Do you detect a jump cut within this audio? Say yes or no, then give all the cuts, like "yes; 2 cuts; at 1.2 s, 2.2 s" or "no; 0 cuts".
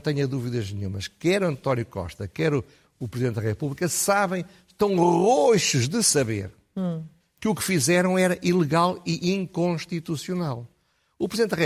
no; 0 cuts